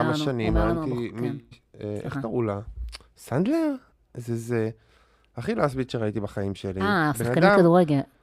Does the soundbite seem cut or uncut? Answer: uncut